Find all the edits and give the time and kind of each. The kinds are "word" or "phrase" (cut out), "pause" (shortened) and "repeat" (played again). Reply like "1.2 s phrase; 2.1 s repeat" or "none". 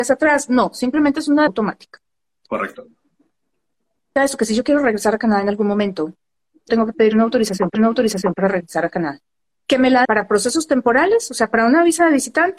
1.5 s word; 4.2 s word; 6.7 s word; 7.7 s repeat; 9.4 s pause; 10.0 s word